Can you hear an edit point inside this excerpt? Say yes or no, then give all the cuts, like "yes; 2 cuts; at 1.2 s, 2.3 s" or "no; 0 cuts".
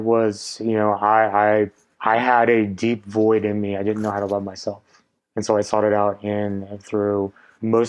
no; 0 cuts